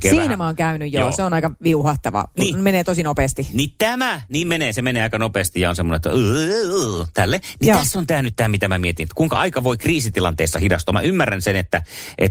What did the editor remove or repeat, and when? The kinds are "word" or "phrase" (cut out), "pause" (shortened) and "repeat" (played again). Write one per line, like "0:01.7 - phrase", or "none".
none